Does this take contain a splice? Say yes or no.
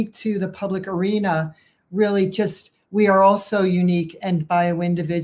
no